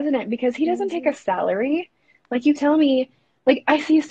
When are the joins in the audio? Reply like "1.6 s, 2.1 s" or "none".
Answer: 2.6 s